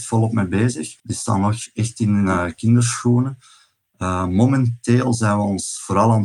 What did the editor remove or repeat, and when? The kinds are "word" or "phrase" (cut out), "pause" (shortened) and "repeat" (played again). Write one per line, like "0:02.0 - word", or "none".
0:01.0 - pause